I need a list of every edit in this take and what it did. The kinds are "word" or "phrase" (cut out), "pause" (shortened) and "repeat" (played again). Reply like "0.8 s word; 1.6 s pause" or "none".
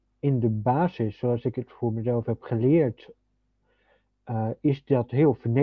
none